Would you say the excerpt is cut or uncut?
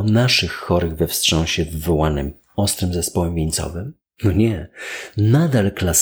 uncut